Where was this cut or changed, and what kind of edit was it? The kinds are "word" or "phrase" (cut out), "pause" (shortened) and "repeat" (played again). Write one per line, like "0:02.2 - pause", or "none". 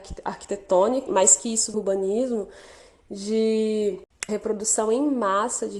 0:01.1 - word
0:01.7 - phrase
0:04.3 - word